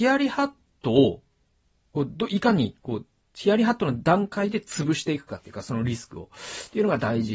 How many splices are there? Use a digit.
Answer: 0